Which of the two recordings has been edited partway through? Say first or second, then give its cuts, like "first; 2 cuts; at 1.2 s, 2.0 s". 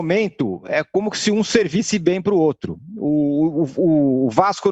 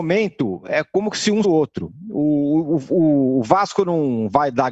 second; 1 cut; at 1.4 s